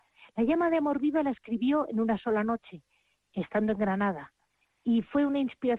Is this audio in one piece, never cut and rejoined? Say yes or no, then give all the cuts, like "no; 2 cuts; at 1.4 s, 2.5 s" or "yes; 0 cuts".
yes; 0 cuts